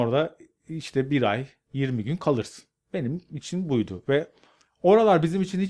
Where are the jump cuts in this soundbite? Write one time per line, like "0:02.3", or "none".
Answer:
none